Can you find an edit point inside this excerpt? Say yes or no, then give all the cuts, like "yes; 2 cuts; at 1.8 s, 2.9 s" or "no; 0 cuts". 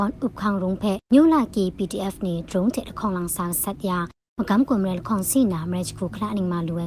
yes; 1 cut; at 1.0 s